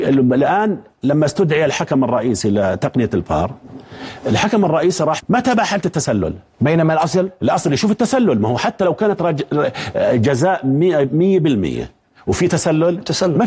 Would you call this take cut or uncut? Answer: cut